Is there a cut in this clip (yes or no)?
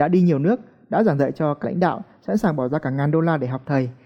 yes